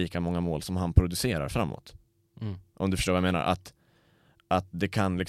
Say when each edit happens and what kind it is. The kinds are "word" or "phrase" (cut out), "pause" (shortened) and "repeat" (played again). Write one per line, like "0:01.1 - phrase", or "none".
none